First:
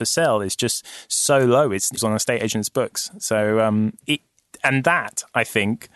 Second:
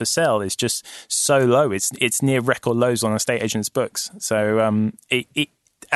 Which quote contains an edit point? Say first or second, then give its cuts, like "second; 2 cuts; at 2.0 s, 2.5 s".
first; 2 cuts; at 2.0 s, 4.0 s